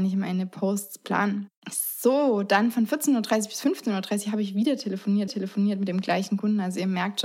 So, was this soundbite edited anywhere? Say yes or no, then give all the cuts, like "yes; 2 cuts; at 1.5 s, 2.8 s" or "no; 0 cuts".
yes; 2 cuts; at 1.6 s, 5.3 s